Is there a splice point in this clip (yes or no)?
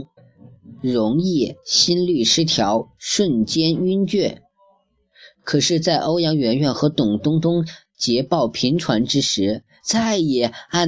no